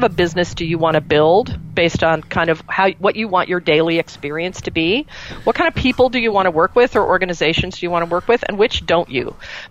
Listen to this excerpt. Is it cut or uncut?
uncut